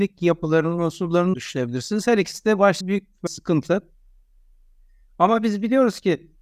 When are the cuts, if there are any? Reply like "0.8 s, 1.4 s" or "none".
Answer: 1.3 s, 2.8 s, 3.3 s